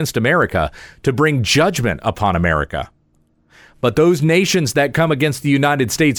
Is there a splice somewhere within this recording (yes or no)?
no